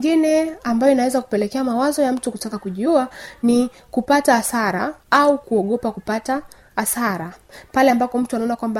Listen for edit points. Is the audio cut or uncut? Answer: uncut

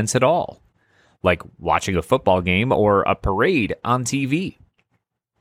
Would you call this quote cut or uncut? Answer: uncut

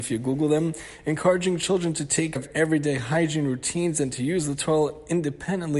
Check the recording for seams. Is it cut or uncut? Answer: cut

